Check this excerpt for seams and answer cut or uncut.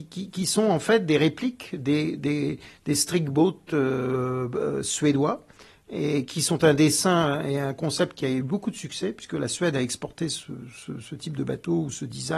uncut